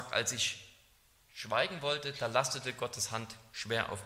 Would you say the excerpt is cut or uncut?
uncut